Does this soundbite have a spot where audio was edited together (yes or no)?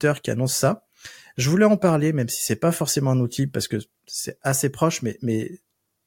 no